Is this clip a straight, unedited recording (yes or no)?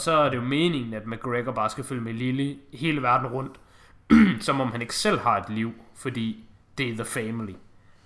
yes